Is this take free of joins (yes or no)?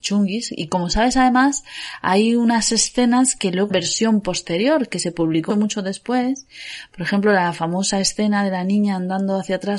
no